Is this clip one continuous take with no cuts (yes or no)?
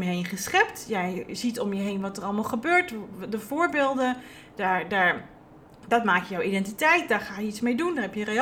yes